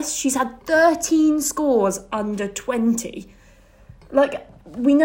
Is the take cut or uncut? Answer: uncut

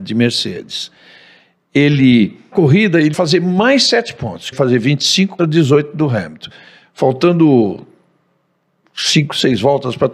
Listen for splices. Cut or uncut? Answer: cut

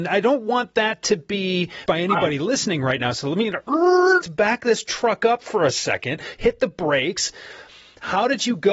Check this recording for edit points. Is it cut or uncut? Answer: cut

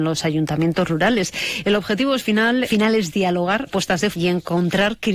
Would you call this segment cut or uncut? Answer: cut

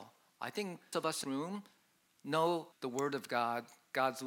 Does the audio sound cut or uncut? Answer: cut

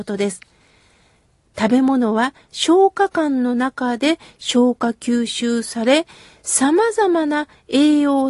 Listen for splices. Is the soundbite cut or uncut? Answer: uncut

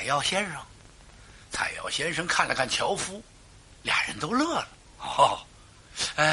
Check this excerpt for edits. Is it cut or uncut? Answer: cut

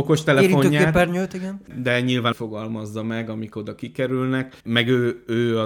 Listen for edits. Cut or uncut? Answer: cut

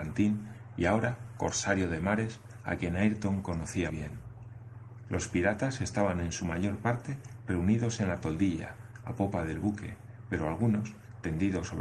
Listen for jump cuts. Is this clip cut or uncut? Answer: cut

